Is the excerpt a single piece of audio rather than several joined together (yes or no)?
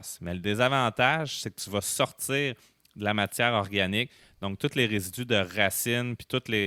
yes